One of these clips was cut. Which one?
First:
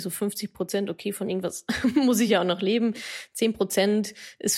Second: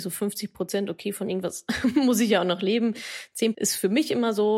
second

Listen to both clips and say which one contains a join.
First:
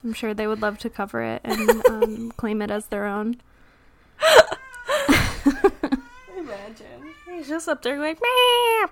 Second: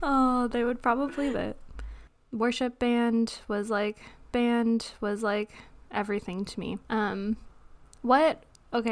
second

